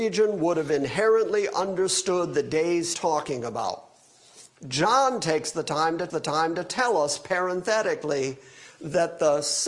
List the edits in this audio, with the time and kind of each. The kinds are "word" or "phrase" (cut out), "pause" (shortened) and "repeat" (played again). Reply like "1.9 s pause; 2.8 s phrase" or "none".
2.9 s phrase; 6.1 s repeat